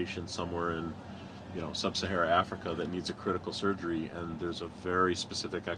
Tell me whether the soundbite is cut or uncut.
uncut